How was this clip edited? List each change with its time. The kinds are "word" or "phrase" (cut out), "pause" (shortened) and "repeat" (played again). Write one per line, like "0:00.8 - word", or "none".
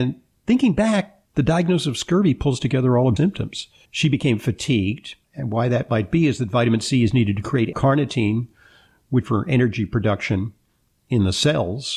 0:01.3 - pause
0:03.2 - word
0:03.8 - pause
0:05.2 - pause
0:07.7 - word
0:09.2 - phrase